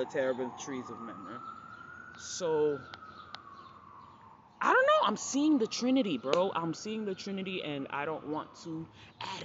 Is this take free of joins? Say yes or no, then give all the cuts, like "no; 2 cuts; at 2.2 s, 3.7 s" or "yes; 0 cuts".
yes; 0 cuts